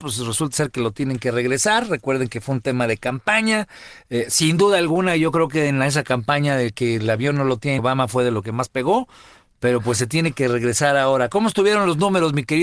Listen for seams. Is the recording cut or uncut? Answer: cut